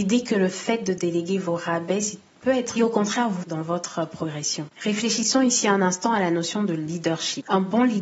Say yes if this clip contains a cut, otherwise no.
yes